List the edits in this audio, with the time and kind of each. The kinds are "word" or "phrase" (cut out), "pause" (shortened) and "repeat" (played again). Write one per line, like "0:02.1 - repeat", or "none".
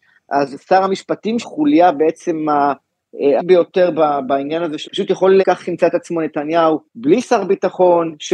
0:01.4 - word
0:03.4 - word
0:04.8 - word
0:05.4 - word
0:06.9 - pause